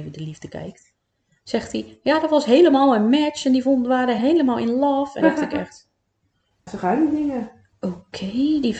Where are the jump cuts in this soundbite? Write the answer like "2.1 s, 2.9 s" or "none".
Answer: 4.2 s, 5.2 s, 6.7 s

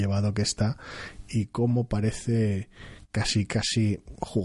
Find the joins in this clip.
none

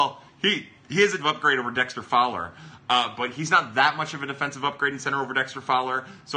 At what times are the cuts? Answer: 1.2 s

